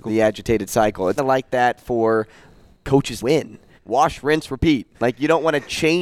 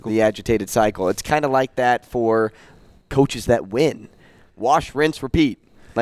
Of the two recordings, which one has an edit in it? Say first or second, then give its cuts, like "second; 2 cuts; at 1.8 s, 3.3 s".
first; 4 cuts; at 1.2 s, 3.2 s, 3.8 s, 4.9 s